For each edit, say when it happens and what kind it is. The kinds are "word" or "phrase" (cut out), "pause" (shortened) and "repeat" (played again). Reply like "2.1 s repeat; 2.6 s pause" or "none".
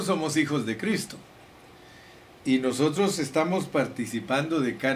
none